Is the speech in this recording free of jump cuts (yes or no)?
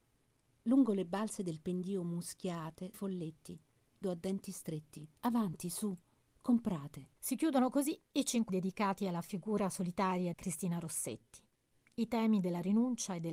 no